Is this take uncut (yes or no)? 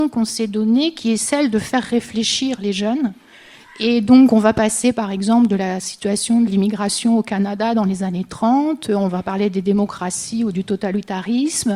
yes